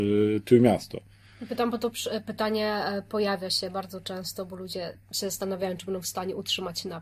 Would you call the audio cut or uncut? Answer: uncut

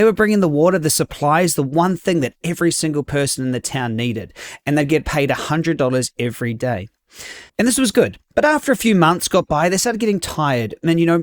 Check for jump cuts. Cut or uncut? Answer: cut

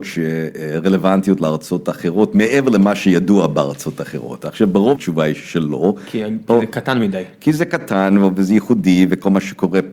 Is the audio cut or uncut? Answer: cut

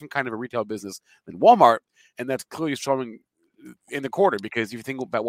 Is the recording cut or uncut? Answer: cut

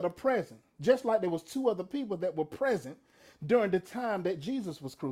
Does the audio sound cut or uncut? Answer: uncut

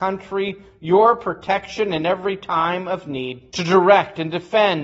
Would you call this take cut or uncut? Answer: cut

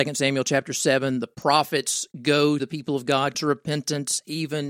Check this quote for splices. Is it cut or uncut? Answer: cut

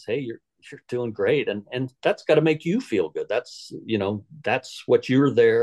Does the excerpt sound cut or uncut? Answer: uncut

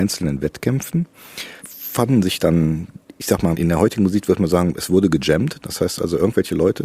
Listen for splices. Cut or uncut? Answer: cut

